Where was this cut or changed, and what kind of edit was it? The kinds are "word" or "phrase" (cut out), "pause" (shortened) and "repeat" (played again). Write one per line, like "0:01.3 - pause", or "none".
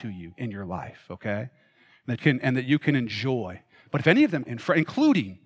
0:02.2 - word
0:04.5 - word